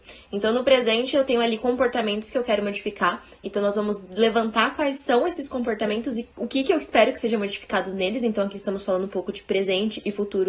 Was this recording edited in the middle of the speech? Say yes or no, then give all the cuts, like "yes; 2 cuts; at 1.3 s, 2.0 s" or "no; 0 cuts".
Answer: yes; 1 cut; at 6.3 s